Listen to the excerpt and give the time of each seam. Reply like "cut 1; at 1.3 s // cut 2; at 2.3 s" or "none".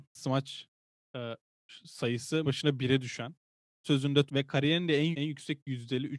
cut 1; at 2.4 s // cut 2; at 3.8 s // cut 3; at 4.3 s // cut 4; at 5.1 s